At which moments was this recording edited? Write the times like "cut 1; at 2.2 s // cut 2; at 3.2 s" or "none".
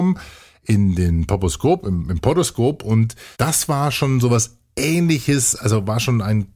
cut 1; at 3.3 s